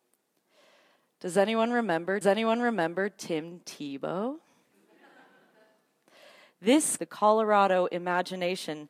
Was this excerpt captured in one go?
no; 2 cuts; at 2.2 s, 7.0 s

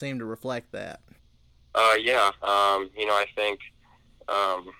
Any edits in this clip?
yes; 1 cut; at 1.2 s

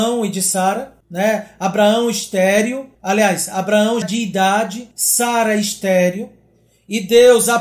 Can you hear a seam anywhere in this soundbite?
yes; 4 cuts; at 1.0 s, 2.9 s, 4.0 s, 4.9 s

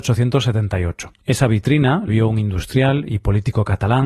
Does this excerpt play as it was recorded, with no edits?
no; 2 cuts; at 1.2 s, 2.1 s

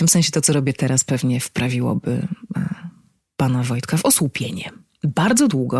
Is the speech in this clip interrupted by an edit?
no; 0 cuts

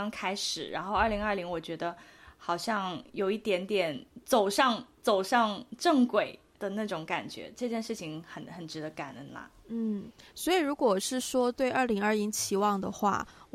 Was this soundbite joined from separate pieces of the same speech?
no; 0 cuts

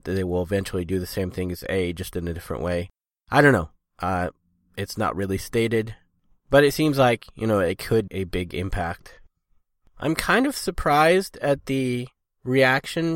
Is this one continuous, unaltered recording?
no; 1 cut; at 8.1 s

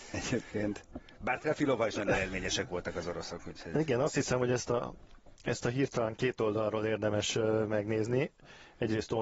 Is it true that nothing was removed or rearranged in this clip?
yes; 0 cuts

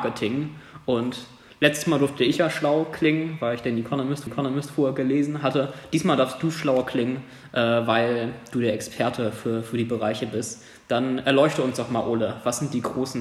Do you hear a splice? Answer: yes; 1 cut; at 4.3 s

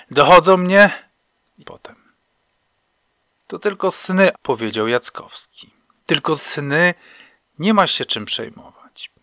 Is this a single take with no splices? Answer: no; 3 cuts; at 1.6 s, 4.3 s, 6.4 s

